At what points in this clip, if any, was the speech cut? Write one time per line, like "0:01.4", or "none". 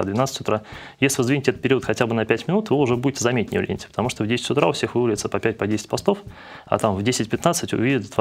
none